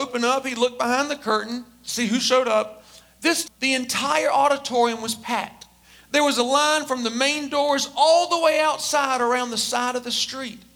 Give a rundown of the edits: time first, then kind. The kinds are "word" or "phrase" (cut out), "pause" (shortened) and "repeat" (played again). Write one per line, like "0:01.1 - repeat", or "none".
0:03.4 - word

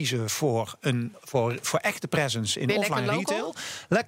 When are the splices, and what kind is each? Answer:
none

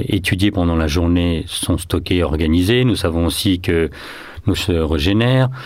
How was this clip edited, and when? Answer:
0:04.6 - word

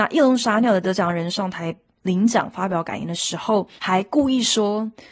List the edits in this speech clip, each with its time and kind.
0:03.8 - pause

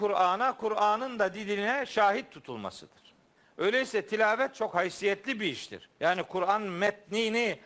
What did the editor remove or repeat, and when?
0:03.4 - pause
0:06.0 - pause

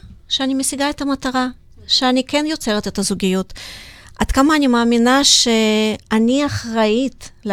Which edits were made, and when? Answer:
none

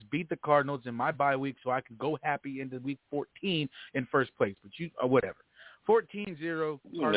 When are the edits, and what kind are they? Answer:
none

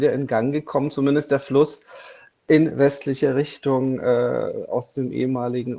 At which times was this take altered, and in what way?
none

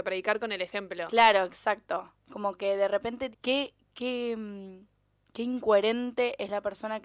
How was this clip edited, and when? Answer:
0:03.3 - word

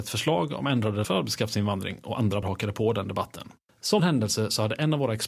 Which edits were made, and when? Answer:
0:01.0 - word
0:02.4 - word
0:04.0 - word

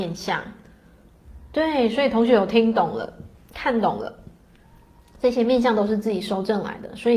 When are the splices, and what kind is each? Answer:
none

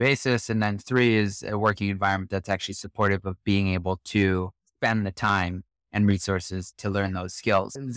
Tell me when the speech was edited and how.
0:06.7 - word

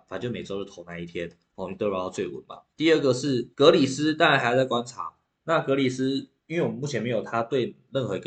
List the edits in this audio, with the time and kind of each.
0:02.7 - pause
0:03.5 - pause
0:06.4 - pause

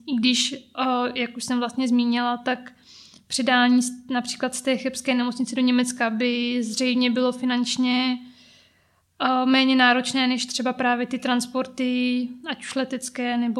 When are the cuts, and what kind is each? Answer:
none

